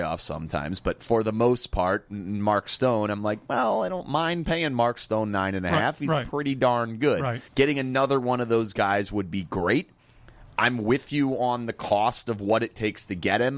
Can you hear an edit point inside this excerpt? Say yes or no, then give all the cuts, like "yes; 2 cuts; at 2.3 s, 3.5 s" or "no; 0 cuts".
yes; 1 cut; at 7.5 s